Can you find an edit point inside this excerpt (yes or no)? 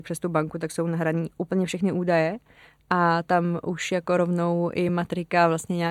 no